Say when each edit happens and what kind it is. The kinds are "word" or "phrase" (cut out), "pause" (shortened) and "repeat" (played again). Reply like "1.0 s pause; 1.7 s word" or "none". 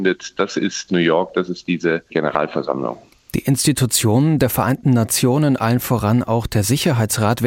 none